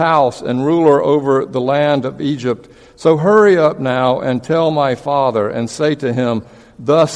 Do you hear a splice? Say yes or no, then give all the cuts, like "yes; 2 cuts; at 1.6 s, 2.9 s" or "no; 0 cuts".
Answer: no; 0 cuts